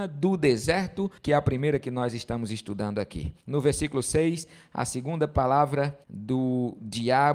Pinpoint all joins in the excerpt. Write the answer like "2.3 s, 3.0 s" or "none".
1.2 s, 3.4 s, 6.0 s